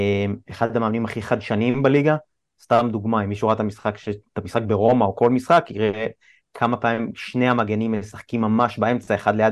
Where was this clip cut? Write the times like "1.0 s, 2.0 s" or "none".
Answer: none